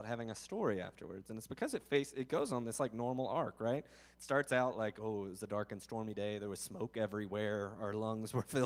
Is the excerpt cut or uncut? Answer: uncut